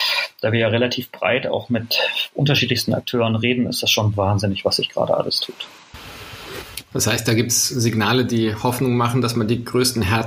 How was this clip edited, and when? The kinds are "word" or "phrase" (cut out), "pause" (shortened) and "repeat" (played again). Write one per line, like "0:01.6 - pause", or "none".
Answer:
none